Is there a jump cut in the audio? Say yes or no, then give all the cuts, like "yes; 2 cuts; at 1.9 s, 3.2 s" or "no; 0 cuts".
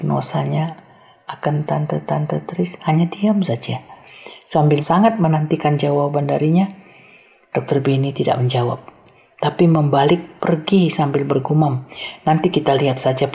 yes; 2 cuts; at 2.1 s, 4.8 s